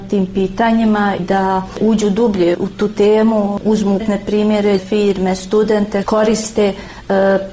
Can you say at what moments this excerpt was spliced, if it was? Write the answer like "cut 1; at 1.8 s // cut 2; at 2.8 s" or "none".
cut 1; at 1.2 s // cut 2; at 2.5 s // cut 3; at 3.6 s // cut 4; at 4.0 s // cut 5; at 4.8 s // cut 6; at 6.0 s